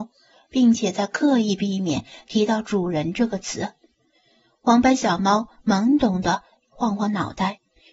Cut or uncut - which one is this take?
uncut